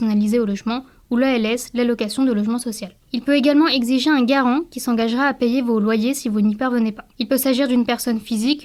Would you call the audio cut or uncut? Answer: cut